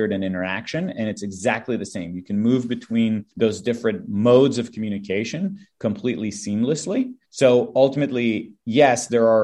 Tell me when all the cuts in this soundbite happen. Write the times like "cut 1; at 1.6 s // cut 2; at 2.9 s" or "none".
cut 1; at 3.3 s // cut 2; at 7.2 s